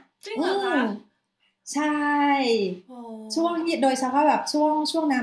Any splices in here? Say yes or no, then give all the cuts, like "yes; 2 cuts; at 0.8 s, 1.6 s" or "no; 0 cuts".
no; 0 cuts